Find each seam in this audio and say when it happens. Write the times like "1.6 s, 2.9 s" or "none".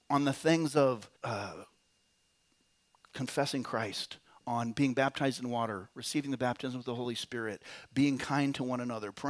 1.2 s